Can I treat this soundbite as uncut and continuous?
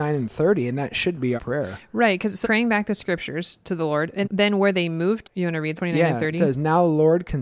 no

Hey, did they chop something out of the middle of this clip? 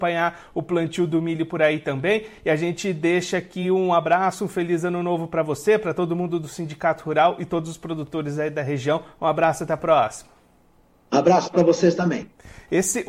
no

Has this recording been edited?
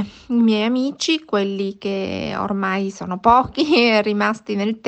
no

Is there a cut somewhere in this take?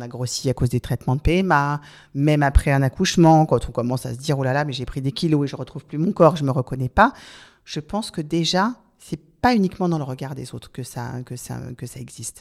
no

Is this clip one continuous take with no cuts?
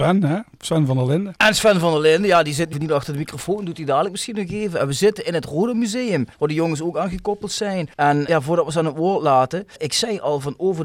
no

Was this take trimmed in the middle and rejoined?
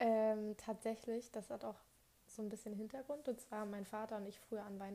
no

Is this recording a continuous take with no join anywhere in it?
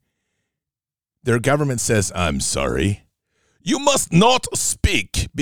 yes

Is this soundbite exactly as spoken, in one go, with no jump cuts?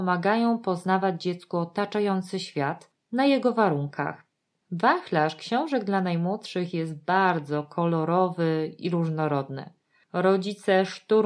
yes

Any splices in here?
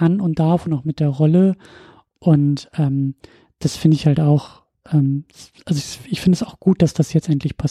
no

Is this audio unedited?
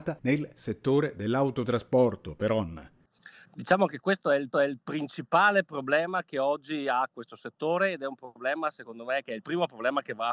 no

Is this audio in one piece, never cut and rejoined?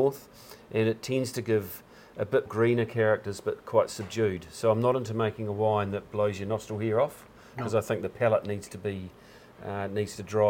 no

